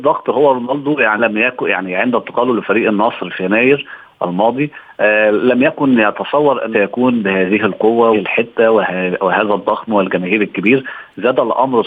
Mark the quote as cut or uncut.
cut